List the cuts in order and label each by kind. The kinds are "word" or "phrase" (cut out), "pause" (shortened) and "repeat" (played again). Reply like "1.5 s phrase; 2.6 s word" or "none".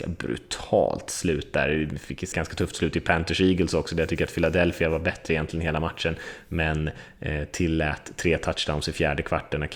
2.3 s word

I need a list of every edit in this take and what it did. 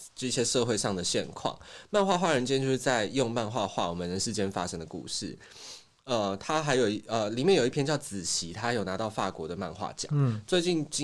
none

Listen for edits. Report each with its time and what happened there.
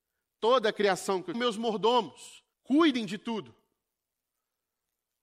1.3 s phrase; 2.5 s pause

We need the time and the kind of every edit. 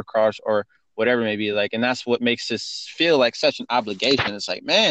none

